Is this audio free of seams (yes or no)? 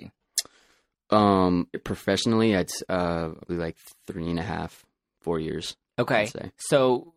no